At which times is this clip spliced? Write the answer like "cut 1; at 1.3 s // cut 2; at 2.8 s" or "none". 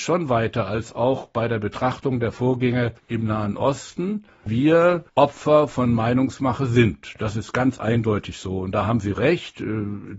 cut 1; at 3.0 s // cut 2; at 5.1 s